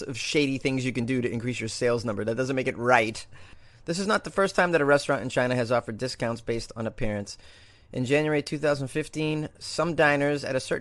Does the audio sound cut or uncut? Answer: uncut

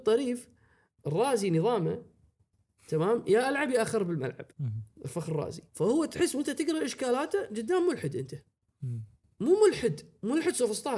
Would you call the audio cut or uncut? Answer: cut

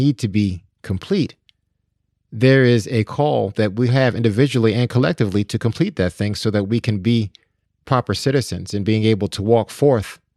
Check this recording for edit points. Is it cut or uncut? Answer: uncut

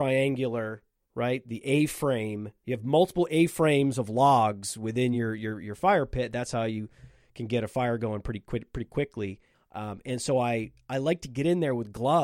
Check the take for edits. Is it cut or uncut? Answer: uncut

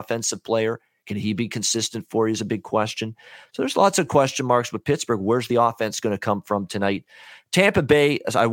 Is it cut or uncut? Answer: uncut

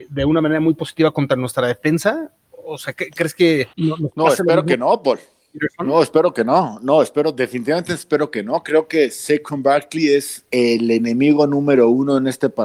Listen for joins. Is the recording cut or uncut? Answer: cut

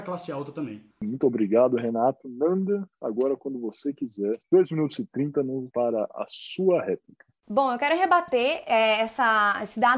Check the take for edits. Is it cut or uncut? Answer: cut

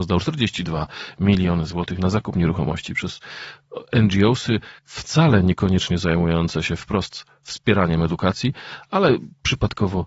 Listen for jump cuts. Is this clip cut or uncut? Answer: cut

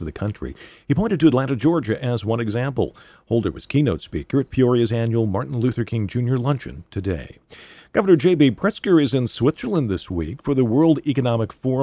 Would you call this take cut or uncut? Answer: uncut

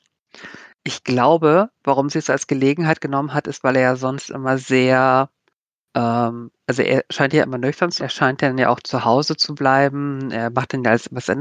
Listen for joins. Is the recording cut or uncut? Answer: cut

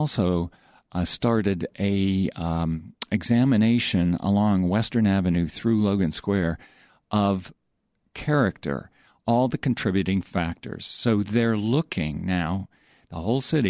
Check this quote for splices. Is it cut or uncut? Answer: uncut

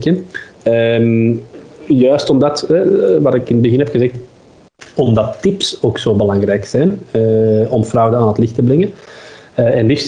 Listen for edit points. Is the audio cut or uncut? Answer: uncut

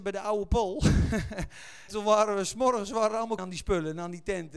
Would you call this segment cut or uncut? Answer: cut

